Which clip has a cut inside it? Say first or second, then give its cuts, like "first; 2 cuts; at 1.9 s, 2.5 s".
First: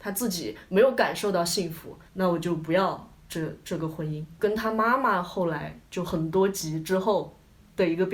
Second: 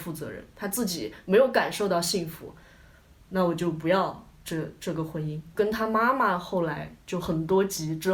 first; 1 cut; at 2.1 s